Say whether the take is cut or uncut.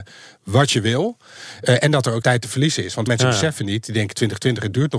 cut